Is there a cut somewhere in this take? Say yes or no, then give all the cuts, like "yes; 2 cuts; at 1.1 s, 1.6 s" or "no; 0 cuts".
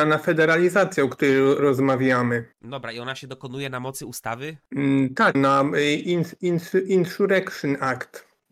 yes; 3 cuts; at 2.5 s, 4.6 s, 5.3 s